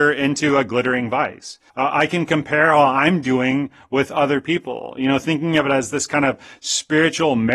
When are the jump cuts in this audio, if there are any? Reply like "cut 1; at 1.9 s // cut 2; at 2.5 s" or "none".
cut 1; at 1.7 s